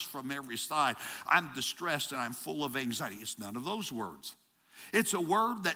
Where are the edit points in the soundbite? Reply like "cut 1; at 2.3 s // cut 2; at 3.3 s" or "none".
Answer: none